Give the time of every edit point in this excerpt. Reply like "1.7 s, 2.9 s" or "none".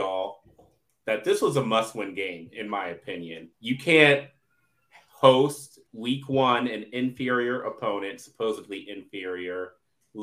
3.5 s, 5.9 s

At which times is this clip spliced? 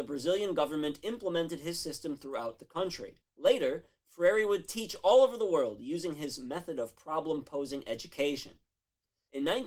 3.2 s

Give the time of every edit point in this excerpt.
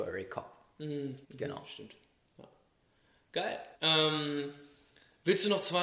1.2 s, 3.8 s

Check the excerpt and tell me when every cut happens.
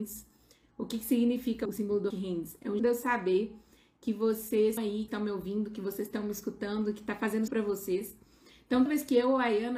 1.7 s, 2.1 s, 2.8 s, 4.8 s, 5.1 s, 7.5 s, 8.9 s

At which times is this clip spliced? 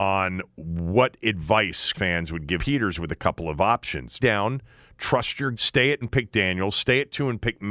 1.9 s, 2.6 s, 4.2 s, 5.5 s, 6.0 s

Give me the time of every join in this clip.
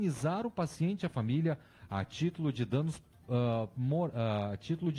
none

